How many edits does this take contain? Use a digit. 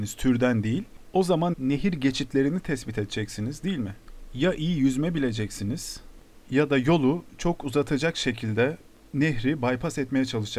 1